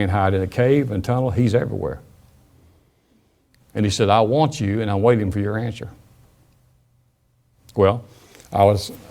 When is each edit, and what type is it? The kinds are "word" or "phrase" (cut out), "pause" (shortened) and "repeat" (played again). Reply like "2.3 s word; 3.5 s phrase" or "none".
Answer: none